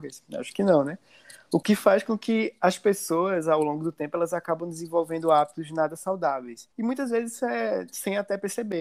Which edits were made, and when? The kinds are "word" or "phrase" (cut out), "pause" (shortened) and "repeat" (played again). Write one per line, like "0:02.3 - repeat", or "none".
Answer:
0:06.7 - pause